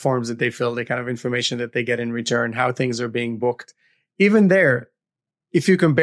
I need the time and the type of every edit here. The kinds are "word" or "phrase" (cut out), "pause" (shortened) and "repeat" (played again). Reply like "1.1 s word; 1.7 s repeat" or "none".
none